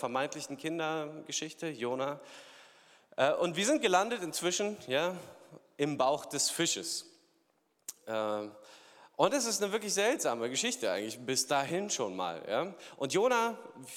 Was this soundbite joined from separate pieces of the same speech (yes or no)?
no